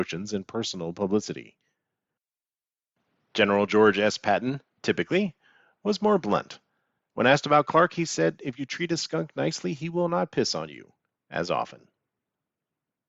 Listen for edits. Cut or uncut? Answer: uncut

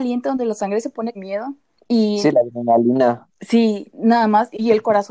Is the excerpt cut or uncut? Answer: cut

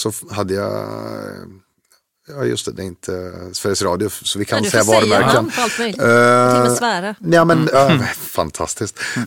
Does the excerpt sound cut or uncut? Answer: uncut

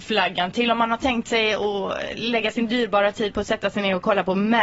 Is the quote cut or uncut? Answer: uncut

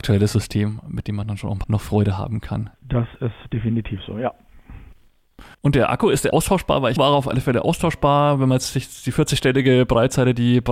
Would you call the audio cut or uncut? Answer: cut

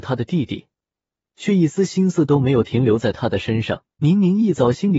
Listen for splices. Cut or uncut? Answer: cut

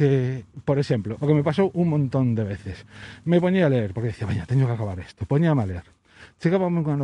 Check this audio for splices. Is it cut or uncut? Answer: uncut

